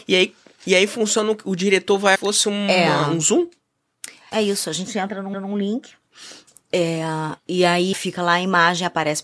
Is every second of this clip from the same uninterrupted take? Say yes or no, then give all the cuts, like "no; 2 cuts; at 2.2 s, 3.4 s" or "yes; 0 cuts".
no; 5 cuts; at 2.2 s, 4.3 s, 5.3 s, 7.4 s, 7.9 s